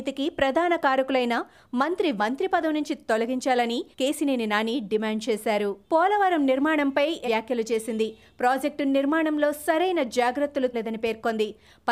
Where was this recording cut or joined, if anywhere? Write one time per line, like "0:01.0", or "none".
0:02.2
0:03.9
0:05.8
0:07.2
0:10.7